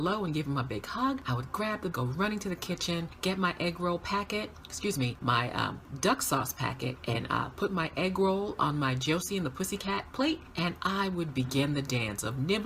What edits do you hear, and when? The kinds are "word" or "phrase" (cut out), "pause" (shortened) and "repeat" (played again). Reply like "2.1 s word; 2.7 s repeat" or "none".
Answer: 1.9 s word